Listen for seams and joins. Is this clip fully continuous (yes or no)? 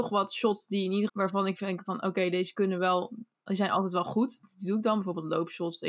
no